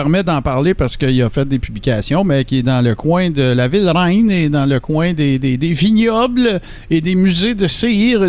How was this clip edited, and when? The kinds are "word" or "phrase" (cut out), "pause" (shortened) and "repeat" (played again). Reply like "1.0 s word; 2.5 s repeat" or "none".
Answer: none